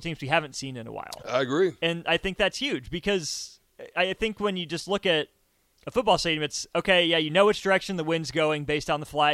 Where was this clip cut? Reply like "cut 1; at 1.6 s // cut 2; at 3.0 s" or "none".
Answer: none